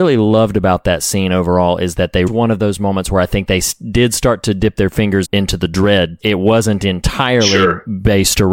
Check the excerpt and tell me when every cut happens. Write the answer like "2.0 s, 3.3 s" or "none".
2.3 s, 5.2 s, 6.2 s